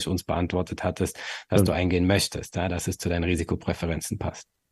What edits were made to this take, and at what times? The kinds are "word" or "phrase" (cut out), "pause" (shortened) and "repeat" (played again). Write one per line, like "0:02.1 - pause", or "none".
none